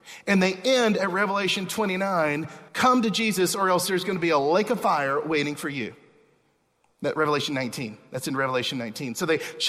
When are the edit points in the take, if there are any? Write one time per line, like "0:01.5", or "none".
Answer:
0:02.7